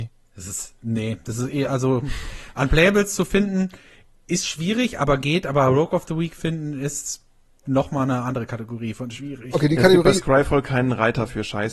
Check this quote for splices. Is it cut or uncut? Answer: uncut